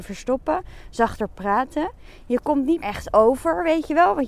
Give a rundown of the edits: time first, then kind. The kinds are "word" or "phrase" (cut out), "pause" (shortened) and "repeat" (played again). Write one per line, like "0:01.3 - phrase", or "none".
0:02.8 - word

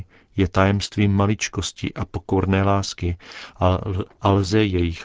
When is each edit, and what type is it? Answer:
0:04.1 - pause

